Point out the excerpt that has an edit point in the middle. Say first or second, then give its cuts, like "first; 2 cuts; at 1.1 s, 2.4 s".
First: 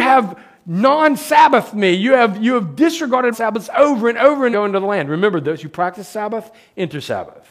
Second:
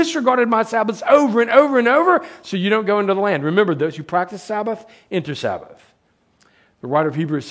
first; 2 cuts; at 3.3 s, 4.5 s